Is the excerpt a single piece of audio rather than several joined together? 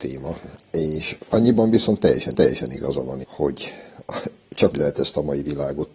no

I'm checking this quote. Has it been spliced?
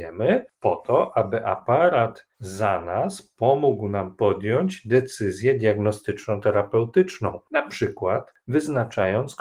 yes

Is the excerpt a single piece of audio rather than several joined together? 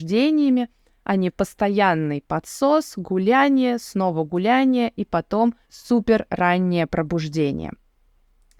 no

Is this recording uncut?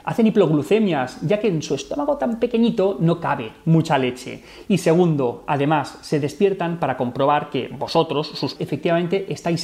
no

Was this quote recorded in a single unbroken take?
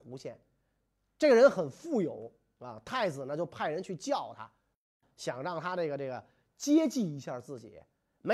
yes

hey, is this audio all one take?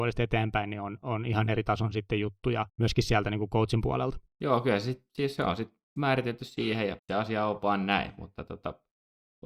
no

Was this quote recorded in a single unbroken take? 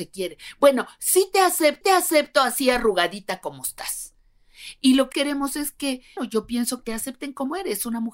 no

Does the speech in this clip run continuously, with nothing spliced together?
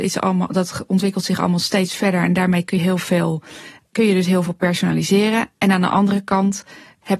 no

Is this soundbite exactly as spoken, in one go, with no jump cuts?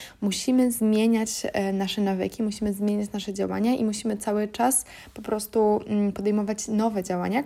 yes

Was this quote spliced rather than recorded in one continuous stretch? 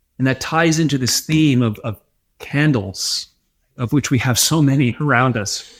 no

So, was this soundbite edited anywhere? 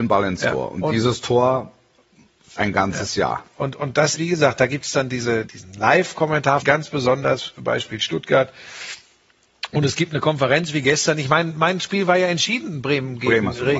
yes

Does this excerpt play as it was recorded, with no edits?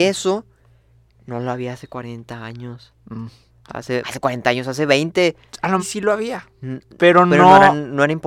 no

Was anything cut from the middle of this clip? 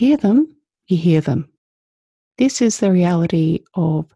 no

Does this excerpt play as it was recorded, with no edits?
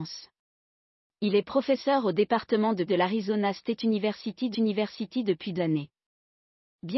no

